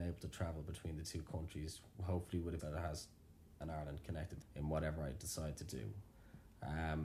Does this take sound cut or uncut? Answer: cut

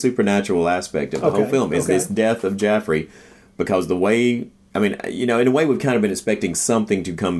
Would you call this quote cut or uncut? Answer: uncut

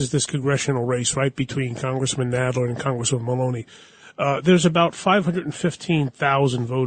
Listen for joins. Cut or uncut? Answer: uncut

